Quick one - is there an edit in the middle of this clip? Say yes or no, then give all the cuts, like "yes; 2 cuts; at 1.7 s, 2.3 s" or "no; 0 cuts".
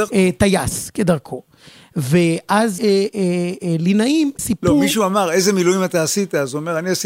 yes; 3 cuts; at 2.8 s, 3.1 s, 4.4 s